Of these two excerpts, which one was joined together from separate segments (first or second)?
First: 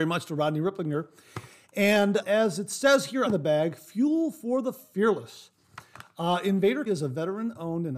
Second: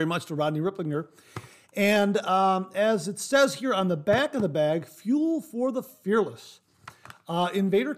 first